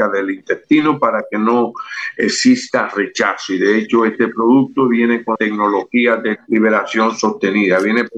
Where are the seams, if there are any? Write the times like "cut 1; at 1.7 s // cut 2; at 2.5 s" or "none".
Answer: cut 1; at 5.4 s // cut 2; at 6.4 s